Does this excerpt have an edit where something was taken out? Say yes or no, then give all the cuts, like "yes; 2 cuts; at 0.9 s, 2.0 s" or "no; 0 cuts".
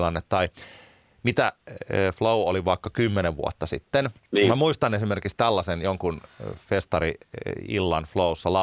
yes; 1 cut; at 4.2 s